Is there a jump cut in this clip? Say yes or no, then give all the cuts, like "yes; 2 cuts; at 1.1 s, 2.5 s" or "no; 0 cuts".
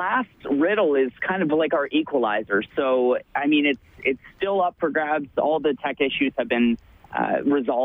no; 0 cuts